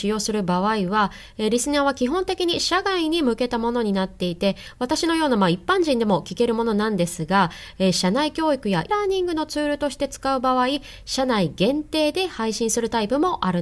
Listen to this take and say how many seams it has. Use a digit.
1